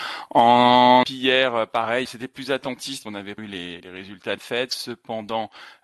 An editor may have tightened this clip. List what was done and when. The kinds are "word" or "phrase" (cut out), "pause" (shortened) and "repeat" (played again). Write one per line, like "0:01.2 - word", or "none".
0:01.0 - word
0:02.0 - word
0:03.0 - word
0:03.4 - word
0:03.8 - word
0:04.4 - word